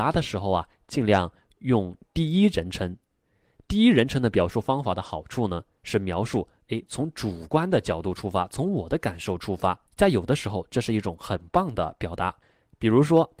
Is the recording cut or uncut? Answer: cut